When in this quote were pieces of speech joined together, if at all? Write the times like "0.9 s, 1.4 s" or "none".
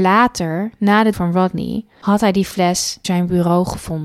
1.1 s, 3.0 s